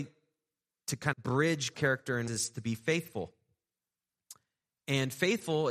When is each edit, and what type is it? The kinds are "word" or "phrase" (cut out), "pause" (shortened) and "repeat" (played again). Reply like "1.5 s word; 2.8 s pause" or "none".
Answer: 1.1 s word; 1.7 s word; 2.3 s word